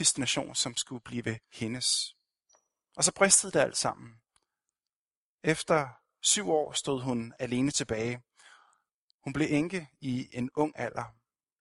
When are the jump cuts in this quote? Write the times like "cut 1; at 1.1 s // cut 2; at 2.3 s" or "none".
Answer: none